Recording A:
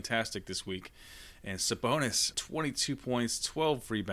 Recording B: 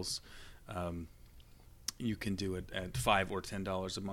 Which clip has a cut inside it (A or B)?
A